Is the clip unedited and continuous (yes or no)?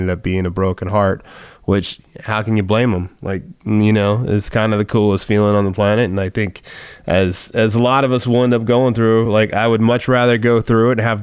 yes